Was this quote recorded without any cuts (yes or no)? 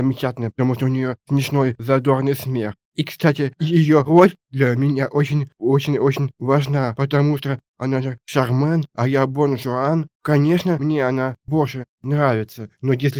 yes